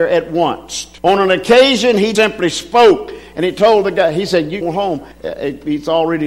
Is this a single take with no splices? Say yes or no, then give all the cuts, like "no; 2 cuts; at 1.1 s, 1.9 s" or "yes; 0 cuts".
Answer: no; 4 cuts; at 1.0 s, 2.1 s, 4.6 s, 5.1 s